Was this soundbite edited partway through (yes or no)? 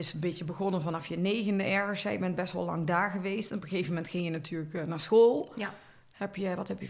no